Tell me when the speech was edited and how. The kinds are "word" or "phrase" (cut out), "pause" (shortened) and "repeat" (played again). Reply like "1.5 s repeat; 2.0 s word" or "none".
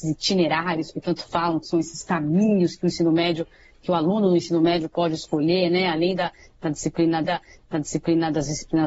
7.2 s repeat

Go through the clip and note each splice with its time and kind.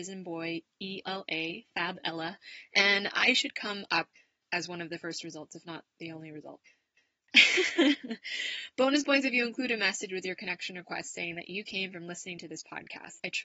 1.0 s word

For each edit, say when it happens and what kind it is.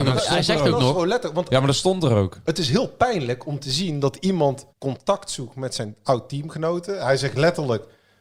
4.7 s pause

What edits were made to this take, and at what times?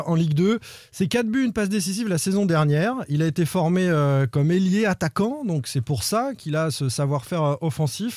none

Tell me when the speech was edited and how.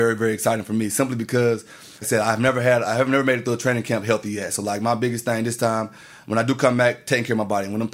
2.0 s word

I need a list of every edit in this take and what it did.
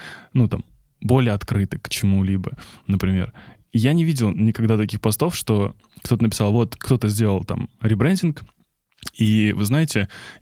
none

